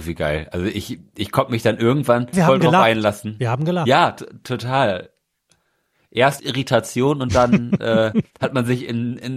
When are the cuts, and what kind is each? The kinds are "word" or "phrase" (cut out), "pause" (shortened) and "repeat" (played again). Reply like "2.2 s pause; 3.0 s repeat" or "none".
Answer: 2.3 s word; 6.4 s word